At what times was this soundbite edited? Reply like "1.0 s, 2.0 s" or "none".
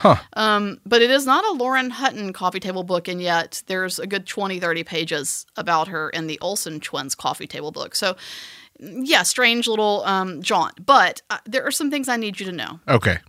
none